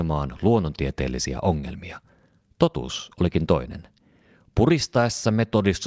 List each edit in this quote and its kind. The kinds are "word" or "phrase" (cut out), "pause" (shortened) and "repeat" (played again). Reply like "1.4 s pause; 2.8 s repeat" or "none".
none

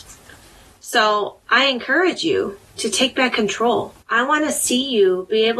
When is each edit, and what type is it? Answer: 4.0 s pause

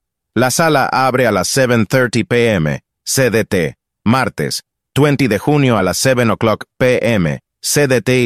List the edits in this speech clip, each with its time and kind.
none

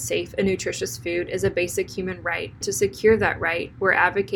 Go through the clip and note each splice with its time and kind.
2.6 s word

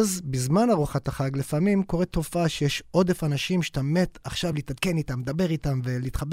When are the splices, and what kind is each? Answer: none

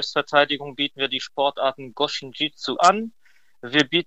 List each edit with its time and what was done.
2.8 s phrase

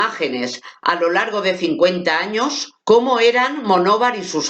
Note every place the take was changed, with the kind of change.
2.8 s pause

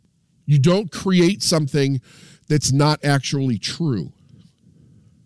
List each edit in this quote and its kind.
none

